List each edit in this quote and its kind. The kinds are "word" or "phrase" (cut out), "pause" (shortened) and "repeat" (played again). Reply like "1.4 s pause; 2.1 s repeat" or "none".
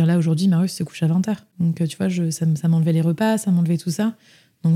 none